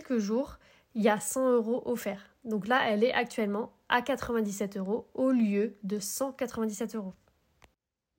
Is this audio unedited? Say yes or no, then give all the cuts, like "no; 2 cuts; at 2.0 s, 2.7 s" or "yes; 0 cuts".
yes; 0 cuts